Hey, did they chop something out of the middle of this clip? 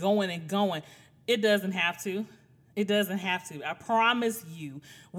no; 0 cuts

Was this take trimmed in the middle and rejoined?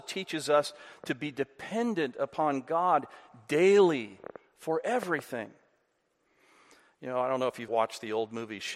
yes; 1 cut; at 7.7 s

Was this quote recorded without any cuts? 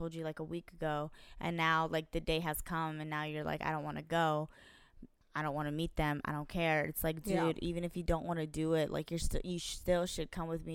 yes; 0 cuts

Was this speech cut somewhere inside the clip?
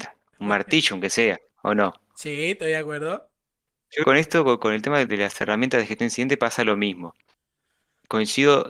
yes; 2 cuts; at 4.0 s, 5.1 s

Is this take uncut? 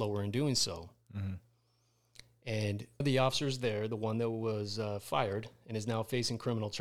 no; 1 cut; at 3.0 s

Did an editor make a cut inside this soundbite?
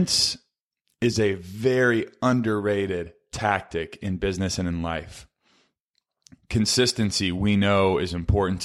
no; 0 cuts

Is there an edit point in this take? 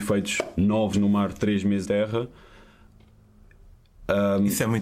yes; 2 cuts; at 0.9 s, 1.9 s

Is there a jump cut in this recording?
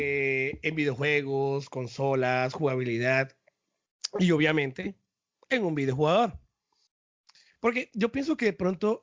no; 0 cuts

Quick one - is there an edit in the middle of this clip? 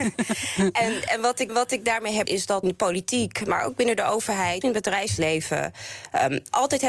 yes; 4 cuts; at 1.5 s, 2.3 s, 2.6 s, 4.6 s

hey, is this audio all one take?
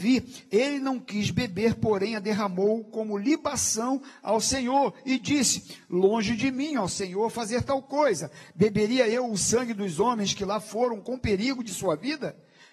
yes; 0 cuts

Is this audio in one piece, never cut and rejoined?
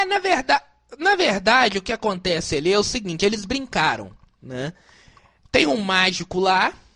yes; 0 cuts

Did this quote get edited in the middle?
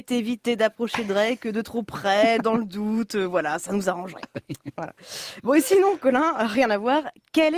no; 0 cuts

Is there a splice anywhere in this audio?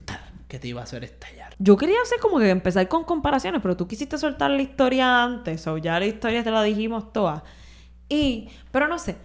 yes; 1 cut; at 1.5 s

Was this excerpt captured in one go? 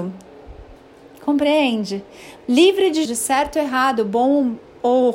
no; 1 cut; at 3.1 s

